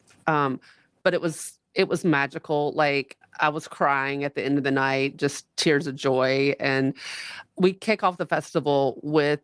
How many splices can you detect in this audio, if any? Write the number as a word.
one